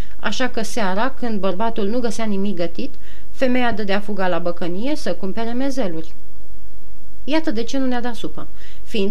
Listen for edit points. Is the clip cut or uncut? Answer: uncut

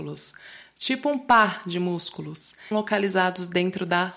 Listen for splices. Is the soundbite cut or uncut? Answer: cut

